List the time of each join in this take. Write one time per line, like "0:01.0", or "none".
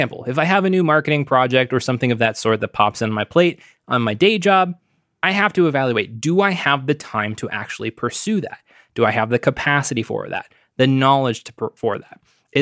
none